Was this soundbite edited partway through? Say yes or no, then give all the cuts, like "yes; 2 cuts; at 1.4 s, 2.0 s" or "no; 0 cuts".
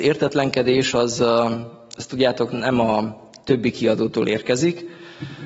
no; 0 cuts